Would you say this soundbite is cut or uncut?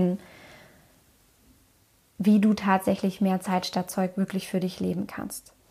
uncut